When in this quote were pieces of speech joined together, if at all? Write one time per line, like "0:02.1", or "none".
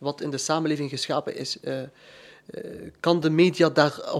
none